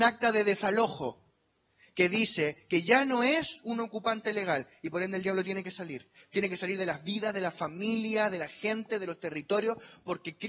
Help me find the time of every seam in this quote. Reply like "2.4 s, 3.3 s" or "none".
none